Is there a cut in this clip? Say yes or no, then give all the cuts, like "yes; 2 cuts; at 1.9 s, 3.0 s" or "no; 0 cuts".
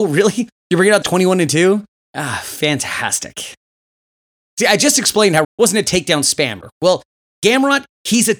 yes; 3 cuts; at 1.0 s, 2.0 s, 5.4 s